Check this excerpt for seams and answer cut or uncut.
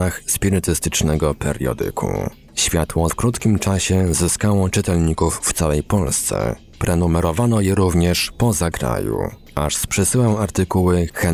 cut